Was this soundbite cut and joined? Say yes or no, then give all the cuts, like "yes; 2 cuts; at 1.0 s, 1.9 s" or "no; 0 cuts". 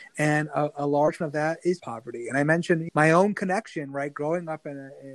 yes; 3 cuts; at 1.2 s, 1.8 s, 2.9 s